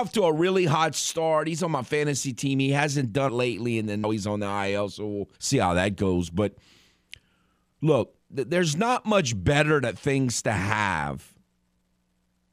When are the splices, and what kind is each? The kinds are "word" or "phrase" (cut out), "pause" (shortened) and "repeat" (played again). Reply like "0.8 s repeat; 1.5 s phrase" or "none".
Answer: 3.3 s phrase; 4.0 s word; 5.4 s pause; 8.2 s pause